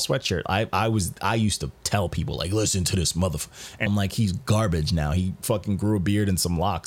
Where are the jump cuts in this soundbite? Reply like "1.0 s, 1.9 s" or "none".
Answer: 3.9 s